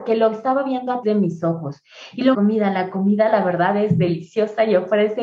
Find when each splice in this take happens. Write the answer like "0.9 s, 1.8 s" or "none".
1.0 s, 2.3 s